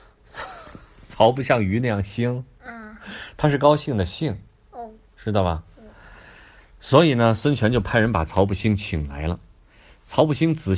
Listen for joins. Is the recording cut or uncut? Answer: uncut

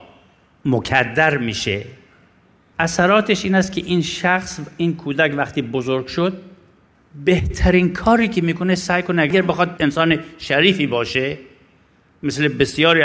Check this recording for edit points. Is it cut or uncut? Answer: uncut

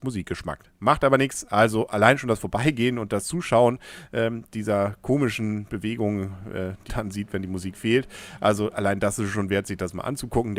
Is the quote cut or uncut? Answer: cut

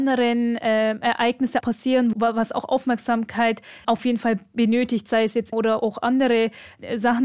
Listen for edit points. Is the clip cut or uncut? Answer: cut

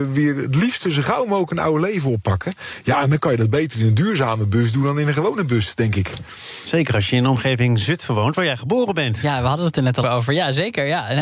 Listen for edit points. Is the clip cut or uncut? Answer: cut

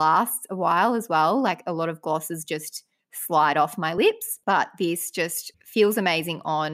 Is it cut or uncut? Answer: cut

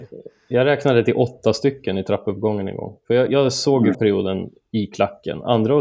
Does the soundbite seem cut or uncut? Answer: cut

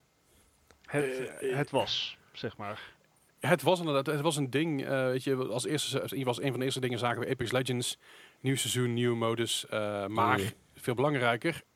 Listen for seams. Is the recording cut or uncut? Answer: uncut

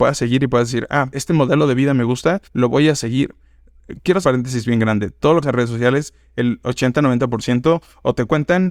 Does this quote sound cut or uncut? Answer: cut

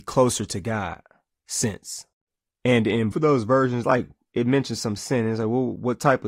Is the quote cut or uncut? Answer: cut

